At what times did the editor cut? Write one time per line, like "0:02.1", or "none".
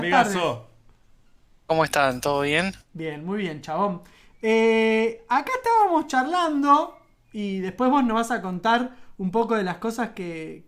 none